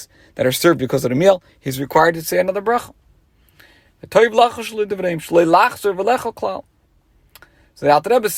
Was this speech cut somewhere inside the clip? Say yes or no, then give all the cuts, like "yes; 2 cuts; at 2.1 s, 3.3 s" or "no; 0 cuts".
no; 0 cuts